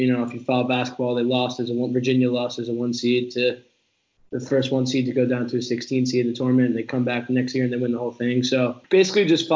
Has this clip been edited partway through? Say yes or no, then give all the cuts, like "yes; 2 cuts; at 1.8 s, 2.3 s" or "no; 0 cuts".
no; 0 cuts